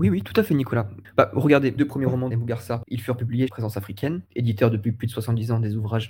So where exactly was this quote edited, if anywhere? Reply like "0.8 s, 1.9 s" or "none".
1.0 s, 1.8 s, 2.3 s, 2.8 s, 3.5 s, 4.3 s